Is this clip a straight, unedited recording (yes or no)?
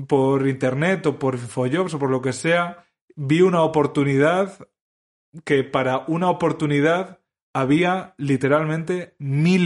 yes